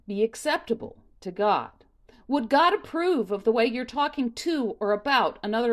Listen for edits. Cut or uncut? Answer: uncut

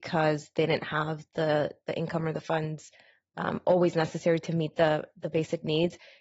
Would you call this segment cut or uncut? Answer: uncut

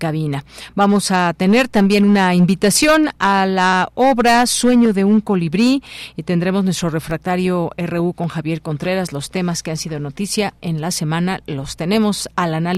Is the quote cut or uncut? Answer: uncut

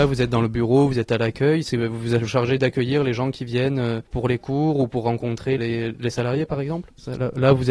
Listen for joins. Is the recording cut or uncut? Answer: cut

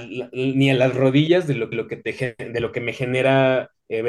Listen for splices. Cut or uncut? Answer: cut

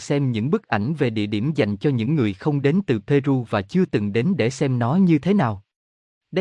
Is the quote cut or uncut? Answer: uncut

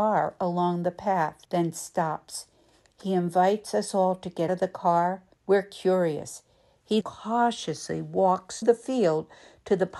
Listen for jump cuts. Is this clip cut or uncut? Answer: cut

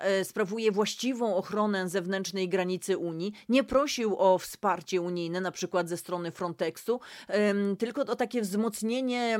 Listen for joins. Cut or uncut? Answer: uncut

